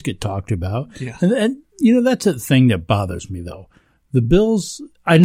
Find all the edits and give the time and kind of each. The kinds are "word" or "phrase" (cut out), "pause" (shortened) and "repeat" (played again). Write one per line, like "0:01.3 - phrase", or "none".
none